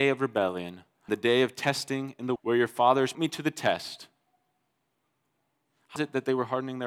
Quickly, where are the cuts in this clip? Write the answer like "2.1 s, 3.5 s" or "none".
1.1 s, 2.4 s, 3.1 s, 6.0 s